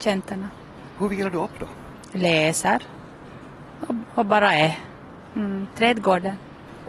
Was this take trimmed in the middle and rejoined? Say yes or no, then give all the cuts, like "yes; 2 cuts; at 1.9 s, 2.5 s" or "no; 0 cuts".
no; 0 cuts